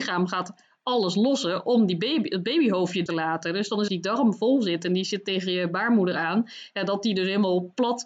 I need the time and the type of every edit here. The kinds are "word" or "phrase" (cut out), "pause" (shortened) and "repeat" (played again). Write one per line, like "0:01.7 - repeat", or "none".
0:03.1 - word
0:03.9 - phrase